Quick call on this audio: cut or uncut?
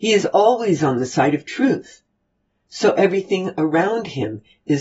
uncut